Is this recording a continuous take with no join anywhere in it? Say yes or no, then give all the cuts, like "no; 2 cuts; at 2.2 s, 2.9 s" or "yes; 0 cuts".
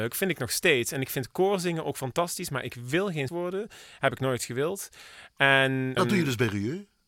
no; 2 cuts; at 3.3 s, 6.0 s